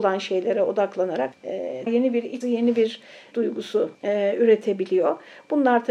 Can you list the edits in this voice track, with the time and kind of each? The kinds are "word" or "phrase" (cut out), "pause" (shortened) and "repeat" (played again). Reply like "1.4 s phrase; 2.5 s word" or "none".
1.3 s word; 1.9 s word; 2.4 s word; 3.3 s word; 3.9 s pause